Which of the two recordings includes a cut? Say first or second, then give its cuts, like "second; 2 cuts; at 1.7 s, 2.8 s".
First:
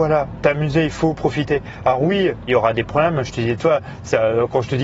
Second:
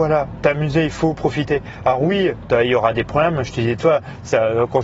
first; 1 cut; at 2.5 s